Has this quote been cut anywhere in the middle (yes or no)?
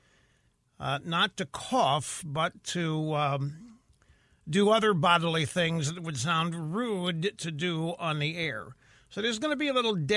no